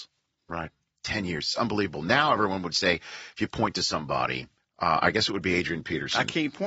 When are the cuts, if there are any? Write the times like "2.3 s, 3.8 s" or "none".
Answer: 4.6 s